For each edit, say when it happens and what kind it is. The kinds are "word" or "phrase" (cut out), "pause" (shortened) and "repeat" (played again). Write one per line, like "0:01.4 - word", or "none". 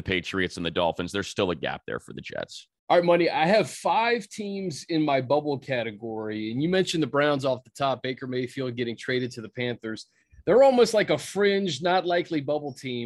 0:02.8 - pause